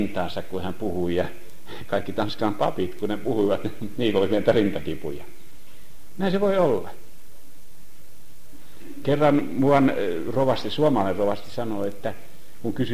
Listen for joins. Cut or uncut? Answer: uncut